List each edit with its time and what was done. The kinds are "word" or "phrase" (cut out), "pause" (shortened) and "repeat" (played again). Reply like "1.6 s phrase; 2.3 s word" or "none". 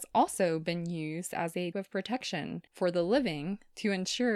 1.7 s word; 2.7 s pause